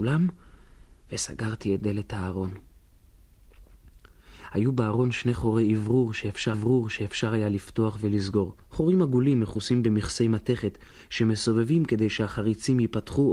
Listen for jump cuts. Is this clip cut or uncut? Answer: cut